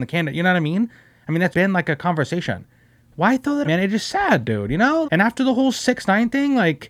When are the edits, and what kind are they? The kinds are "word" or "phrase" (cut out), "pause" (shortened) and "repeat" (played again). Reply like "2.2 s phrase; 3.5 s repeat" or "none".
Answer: 1.5 s word; 3.6 s word; 5.0 s word